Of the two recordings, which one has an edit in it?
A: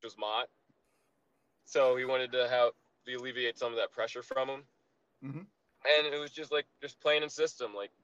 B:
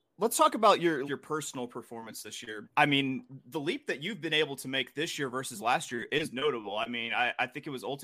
B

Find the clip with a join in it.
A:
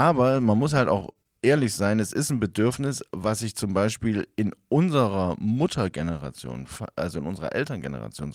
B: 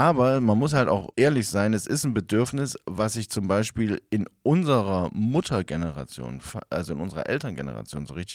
B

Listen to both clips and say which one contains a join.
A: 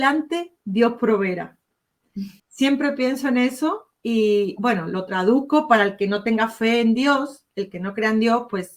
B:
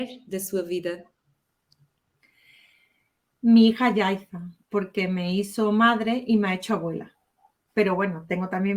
A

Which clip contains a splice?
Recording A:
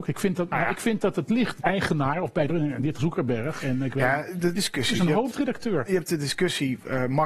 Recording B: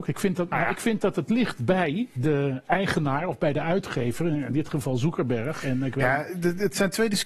A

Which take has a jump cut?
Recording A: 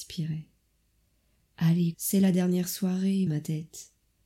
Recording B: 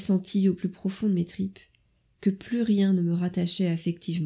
A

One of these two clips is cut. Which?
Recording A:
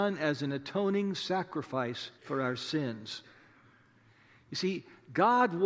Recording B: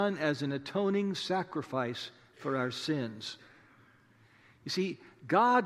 A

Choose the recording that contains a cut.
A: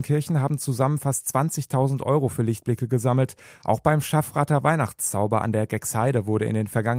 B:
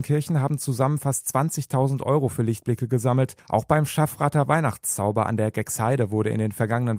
B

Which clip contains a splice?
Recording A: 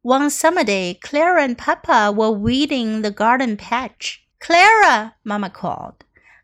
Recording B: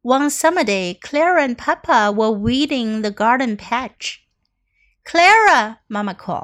A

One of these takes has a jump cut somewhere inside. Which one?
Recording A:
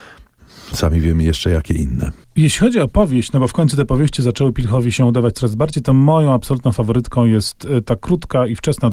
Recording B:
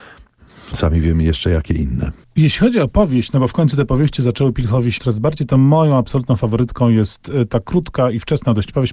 B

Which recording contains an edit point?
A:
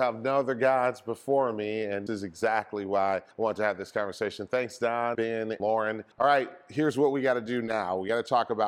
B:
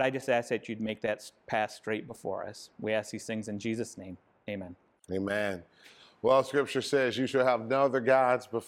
A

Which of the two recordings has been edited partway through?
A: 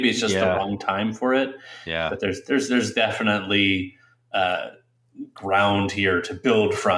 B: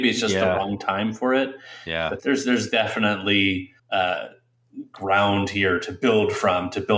B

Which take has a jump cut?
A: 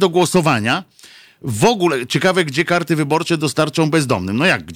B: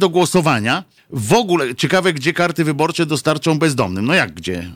B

